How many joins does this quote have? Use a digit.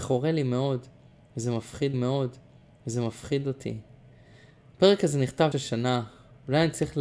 2